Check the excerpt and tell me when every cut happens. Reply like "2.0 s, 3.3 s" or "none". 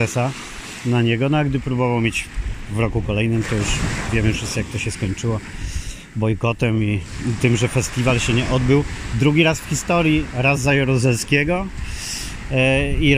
none

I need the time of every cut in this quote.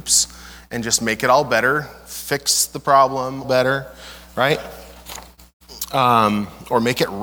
3.4 s

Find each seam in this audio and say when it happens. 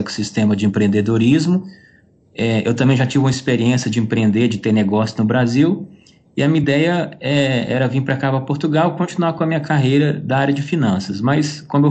none

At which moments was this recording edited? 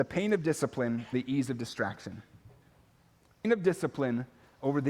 1.1 s, 3.4 s

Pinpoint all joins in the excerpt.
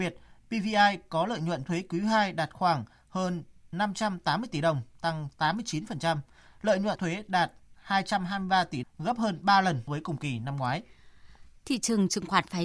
1.6 s, 6.9 s, 8.8 s, 9.9 s

